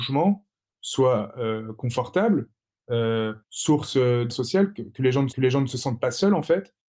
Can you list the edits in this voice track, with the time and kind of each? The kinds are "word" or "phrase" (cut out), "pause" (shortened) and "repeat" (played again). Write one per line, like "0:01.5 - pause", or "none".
0:03.4 - pause
0:04.3 - word
0:05.3 - repeat